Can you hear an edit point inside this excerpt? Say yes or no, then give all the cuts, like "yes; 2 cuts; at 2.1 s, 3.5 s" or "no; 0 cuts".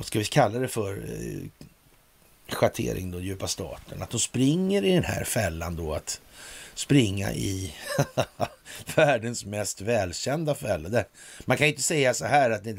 no; 0 cuts